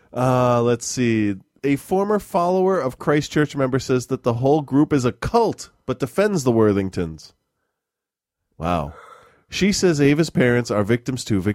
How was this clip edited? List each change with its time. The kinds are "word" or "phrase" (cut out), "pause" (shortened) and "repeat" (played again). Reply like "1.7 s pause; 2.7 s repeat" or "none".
none